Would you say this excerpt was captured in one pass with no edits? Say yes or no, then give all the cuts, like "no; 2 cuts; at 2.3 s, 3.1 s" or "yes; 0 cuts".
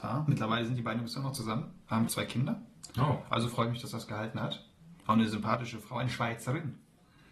no; 2 cuts; at 2.1 s, 2.9 s